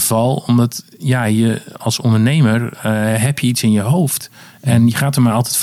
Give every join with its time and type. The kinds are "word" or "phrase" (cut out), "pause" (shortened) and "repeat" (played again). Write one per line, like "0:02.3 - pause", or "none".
none